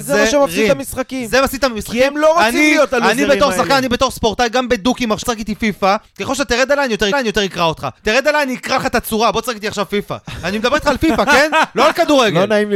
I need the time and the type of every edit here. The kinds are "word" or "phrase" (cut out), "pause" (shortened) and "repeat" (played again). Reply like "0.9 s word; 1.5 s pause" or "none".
5.2 s word; 6.1 s pause; 7.1 s repeat; 8.0 s pause